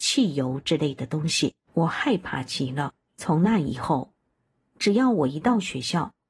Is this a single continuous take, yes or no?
no